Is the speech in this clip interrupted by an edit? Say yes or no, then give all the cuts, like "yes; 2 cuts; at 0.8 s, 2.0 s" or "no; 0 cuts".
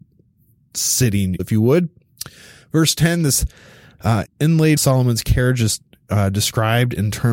yes; 3 cuts; at 1.4 s, 4.3 s, 4.8 s